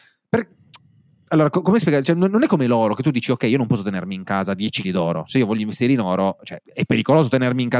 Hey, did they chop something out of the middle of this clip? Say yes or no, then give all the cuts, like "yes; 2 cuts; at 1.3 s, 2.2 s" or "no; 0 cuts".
yes; 2 cuts; at 4.8 s, 6.6 s